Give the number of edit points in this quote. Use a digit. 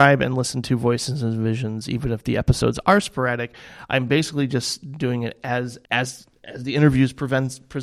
1